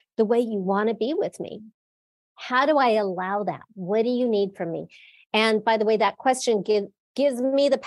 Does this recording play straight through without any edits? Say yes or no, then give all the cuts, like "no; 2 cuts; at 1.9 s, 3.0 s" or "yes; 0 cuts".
yes; 0 cuts